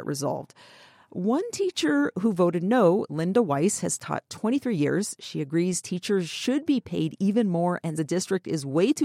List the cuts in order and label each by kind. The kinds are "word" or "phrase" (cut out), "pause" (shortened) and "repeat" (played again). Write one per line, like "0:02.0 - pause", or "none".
0:08.0 - word